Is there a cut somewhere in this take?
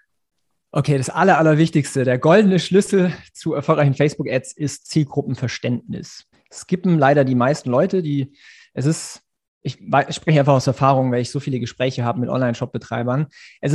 yes; 1 cut; at 6.3 s

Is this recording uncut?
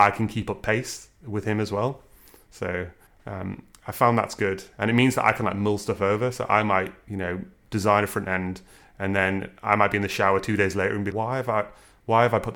no; 2 cuts; at 3.1 s, 11.1 s

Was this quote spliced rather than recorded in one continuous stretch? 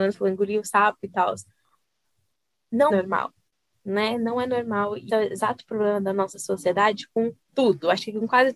yes; 3 cuts; at 2.9 s, 5.1 s, 7.4 s

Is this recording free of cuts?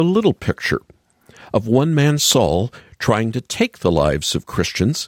yes; 0 cuts

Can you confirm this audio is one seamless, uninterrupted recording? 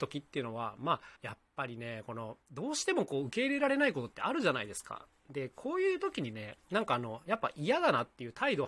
no; 2 cuts; at 1.2 s, 2.4 s

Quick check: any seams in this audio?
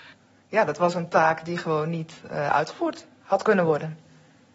no; 0 cuts

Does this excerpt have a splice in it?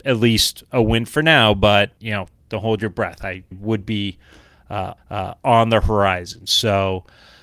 yes; 3 cuts; at 2.0 s, 3.5 s, 5.0 s

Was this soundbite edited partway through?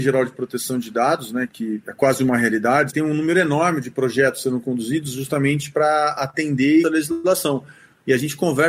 yes; 2 cuts; at 2.9 s, 6.8 s

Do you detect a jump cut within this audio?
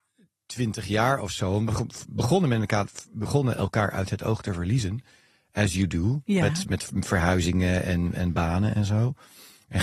no; 0 cuts

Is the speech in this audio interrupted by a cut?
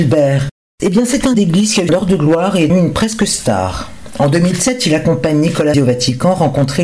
yes; 4 cuts; at 1.3 s, 1.9 s, 2.7 s, 5.7 s

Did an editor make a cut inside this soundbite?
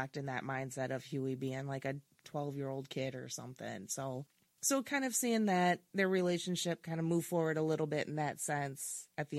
no; 0 cuts

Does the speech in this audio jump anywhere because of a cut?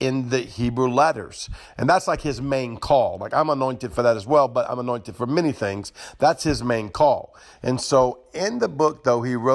no; 0 cuts

